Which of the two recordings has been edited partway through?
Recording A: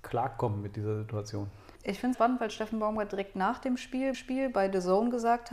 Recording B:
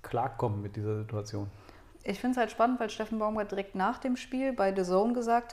A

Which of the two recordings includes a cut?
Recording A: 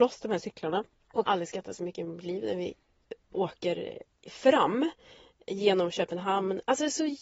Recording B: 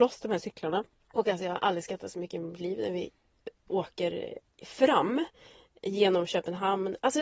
A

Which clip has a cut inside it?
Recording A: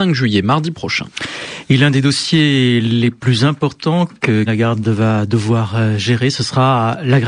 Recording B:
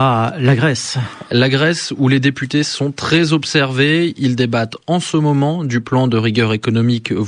A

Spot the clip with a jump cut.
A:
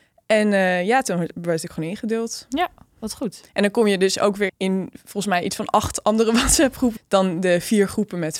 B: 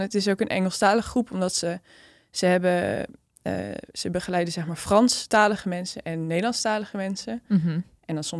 A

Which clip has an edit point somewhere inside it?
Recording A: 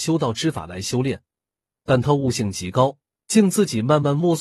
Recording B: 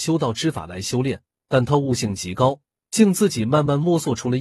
B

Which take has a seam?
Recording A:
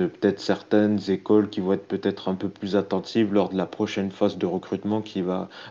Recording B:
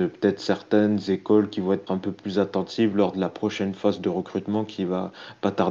B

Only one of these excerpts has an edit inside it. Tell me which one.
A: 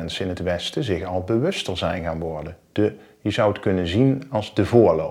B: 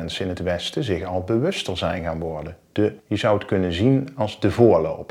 B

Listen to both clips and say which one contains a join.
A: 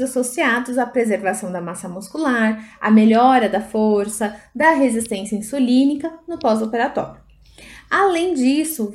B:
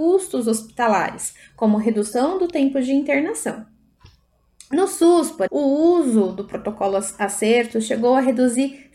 B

